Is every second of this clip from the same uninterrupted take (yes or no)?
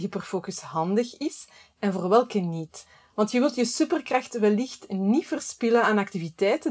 yes